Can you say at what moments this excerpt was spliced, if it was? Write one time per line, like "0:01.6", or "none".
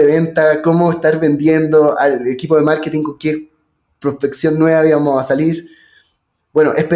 none